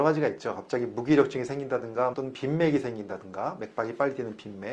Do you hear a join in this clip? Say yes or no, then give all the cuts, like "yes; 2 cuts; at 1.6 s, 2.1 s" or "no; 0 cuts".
yes; 1 cut; at 2.1 s